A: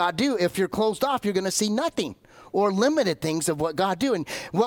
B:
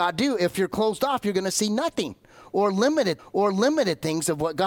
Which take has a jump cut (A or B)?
B